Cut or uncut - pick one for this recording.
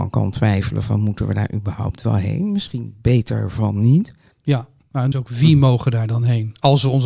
cut